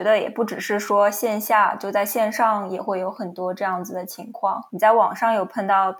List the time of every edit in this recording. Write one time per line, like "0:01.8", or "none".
0:04.7